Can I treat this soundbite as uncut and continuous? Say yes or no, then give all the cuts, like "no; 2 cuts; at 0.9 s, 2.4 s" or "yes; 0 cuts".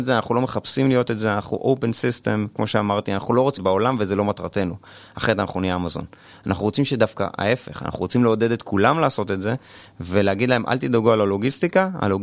no; 1 cut; at 3.6 s